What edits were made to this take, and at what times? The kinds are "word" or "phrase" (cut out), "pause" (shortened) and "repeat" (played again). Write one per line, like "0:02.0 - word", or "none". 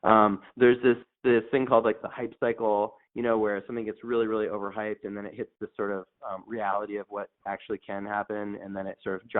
0:02.0 - phrase

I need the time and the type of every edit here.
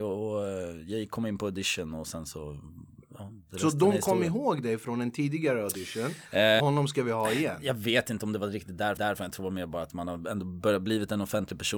0:06.6 - phrase
0:09.0 - repeat

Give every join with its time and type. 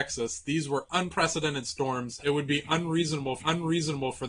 0:03.4 - repeat

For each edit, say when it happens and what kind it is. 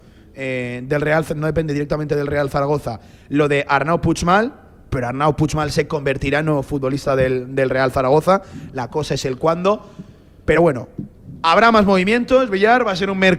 none

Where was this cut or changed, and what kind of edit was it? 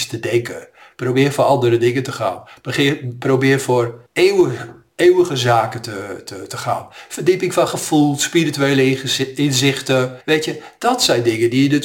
0:04.1 - pause
0:10.2 - pause

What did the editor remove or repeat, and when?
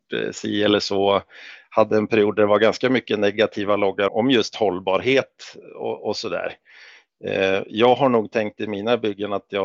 0:04.1 - word

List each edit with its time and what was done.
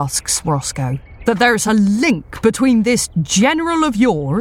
none

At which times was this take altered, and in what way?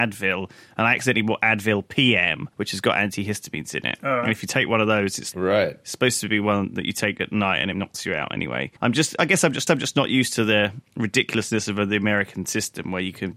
0:02.5 - pause
0:05.3 - word
0:07.7 - phrase
0:08.8 - pause
0:09.7 - repeat

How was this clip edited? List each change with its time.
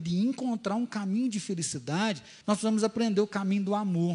0:02.4 - pause

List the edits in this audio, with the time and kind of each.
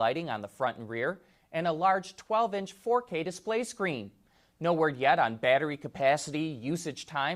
none

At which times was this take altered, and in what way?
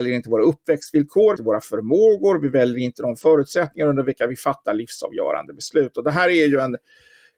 0:01.4 - phrase

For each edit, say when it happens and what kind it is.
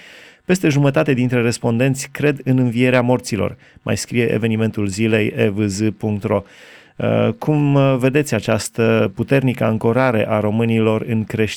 none

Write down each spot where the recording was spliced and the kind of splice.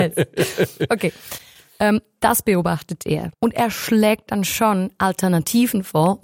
0:03.3 - pause

